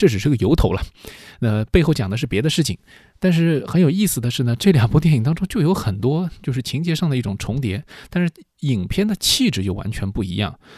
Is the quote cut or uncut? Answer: uncut